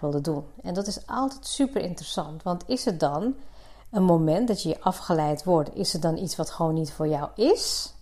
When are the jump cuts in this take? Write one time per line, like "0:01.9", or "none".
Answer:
none